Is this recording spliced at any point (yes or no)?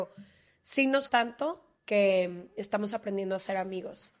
yes